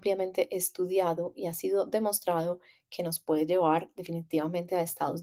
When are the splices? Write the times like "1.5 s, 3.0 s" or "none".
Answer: none